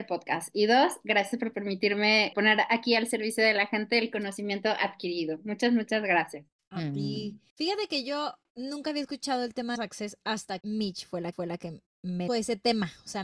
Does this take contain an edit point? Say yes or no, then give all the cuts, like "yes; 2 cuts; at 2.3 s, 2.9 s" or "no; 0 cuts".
yes; 7 cuts; at 2.3 s, 6.6 s, 7.5 s, 9.7 s, 10.6 s, 11.3 s, 12.3 s